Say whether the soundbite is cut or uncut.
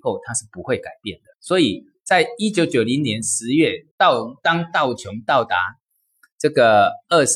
cut